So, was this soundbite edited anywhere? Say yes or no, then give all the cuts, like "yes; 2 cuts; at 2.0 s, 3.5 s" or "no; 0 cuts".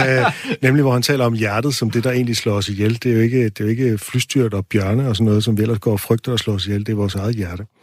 no; 0 cuts